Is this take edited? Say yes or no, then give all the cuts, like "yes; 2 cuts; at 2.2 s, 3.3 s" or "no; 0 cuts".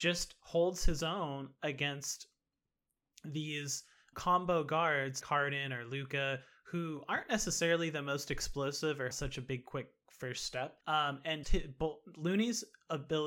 yes; 5 cuts; at 4.1 s, 5.2 s, 9.1 s, 10.8 s, 11.4 s